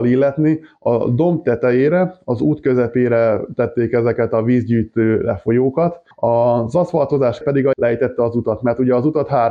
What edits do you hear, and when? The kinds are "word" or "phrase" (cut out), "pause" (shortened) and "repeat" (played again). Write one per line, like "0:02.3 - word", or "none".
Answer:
0:06.1 - pause
0:07.4 - word
0:07.7 - word